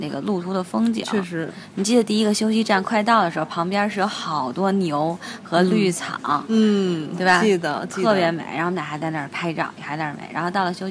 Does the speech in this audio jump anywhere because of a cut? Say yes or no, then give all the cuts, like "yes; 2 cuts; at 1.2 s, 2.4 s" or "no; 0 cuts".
no; 0 cuts